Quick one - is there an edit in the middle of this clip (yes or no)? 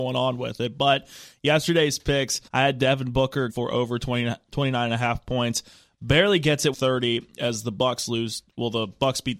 yes